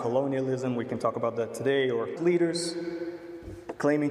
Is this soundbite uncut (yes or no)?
no